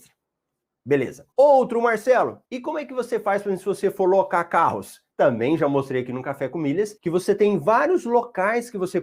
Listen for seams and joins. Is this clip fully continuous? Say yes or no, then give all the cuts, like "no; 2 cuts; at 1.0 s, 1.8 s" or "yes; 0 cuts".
no; 4 cuts; at 1.3 s, 2.5 s, 5.1 s, 7.0 s